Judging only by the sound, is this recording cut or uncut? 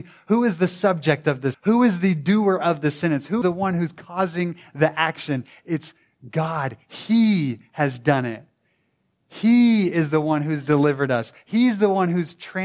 cut